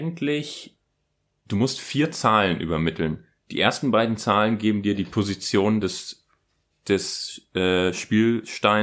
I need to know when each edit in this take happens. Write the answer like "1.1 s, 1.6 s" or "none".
none